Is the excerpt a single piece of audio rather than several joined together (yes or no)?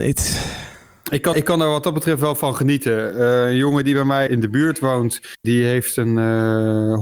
no